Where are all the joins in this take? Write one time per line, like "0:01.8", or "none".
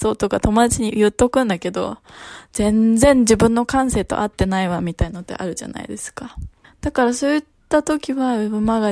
0:06.6